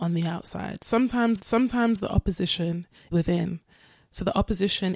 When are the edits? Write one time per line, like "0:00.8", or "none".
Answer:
0:01.4
0:03.1